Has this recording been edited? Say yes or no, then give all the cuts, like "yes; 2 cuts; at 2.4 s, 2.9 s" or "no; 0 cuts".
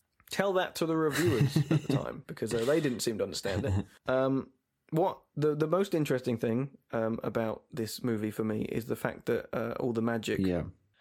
no; 0 cuts